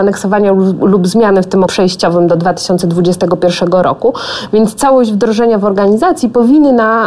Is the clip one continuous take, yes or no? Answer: no